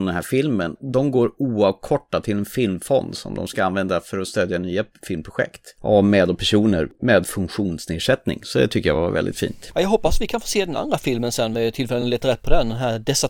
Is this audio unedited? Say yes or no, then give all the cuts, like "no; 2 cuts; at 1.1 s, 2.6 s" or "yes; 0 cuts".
yes; 0 cuts